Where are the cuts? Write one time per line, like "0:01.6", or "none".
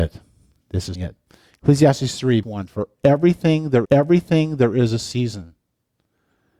0:00.9
0:02.4
0:03.8